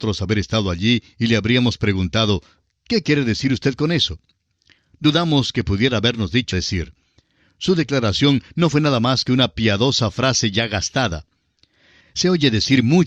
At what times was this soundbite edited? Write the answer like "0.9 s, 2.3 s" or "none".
6.5 s